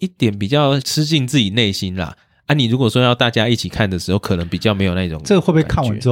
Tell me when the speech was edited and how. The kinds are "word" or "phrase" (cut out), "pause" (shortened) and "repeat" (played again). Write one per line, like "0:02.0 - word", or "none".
none